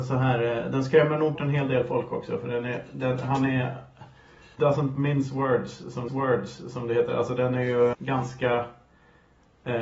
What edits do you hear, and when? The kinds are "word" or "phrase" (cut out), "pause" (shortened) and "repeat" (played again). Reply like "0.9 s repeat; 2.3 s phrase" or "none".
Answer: 1.4 s word; 4.6 s word; 6.1 s repeat; 7.9 s word